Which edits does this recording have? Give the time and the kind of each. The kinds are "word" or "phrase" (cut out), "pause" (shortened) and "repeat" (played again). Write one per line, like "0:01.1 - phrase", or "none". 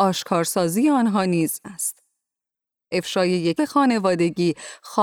0:01.6 - word
0:03.6 - word

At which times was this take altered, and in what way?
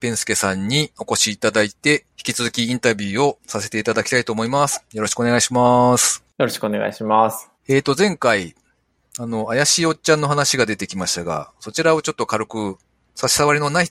0:07.6 - pause

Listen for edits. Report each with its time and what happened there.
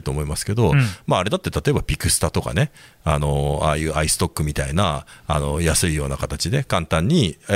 none

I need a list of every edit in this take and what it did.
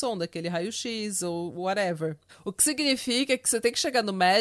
0:02.3 - pause

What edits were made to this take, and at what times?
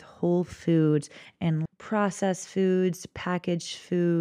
0:01.7 - word

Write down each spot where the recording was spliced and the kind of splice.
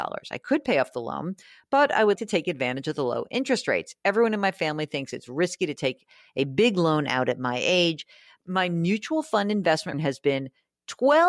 0:02.2 - word
0:09.9 - word

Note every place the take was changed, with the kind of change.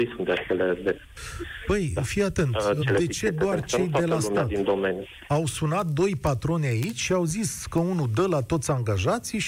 0:02.8 - word

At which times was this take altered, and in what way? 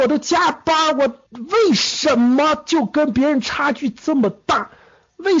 0:01.3 - pause

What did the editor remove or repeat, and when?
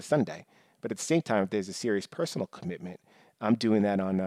none

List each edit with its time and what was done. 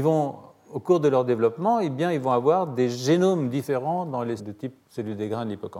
0:04.4 - word
0:04.8 - pause

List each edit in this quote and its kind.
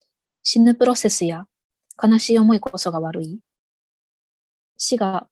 none

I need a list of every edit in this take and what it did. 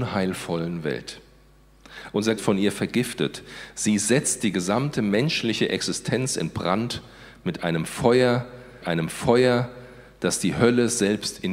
0:02.4 - phrase
0:08.8 - repeat

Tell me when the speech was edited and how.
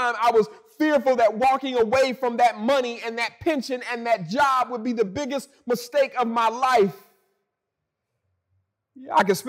none

